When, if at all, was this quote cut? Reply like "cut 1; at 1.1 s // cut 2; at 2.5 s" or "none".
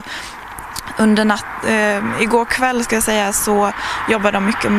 none